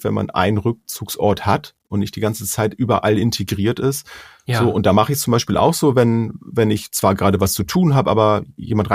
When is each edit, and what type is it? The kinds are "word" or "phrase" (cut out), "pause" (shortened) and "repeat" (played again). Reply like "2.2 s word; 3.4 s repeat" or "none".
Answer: none